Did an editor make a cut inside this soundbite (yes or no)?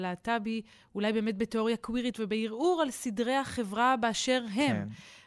no